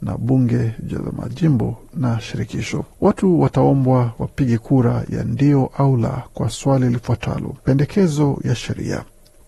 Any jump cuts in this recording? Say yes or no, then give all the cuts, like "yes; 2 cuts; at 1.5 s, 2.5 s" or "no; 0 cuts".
yes; 2 cuts; at 2.9 s, 7.6 s